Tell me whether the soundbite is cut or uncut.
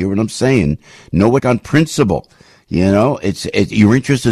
cut